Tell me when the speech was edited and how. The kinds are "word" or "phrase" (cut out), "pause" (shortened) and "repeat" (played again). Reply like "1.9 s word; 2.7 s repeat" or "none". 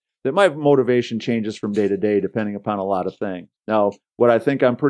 3.6 s pause